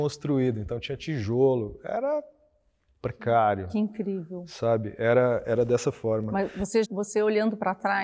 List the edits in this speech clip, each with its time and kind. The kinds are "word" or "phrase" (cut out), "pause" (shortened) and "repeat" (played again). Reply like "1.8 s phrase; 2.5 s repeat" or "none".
6.8 s word